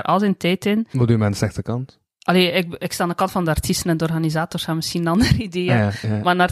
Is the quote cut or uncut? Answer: uncut